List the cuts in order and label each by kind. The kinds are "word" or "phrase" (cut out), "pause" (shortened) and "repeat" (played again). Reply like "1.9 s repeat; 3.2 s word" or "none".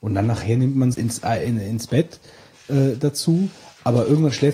0.9 s phrase